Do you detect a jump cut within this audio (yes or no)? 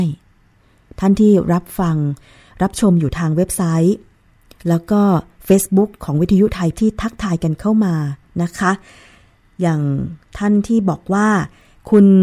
yes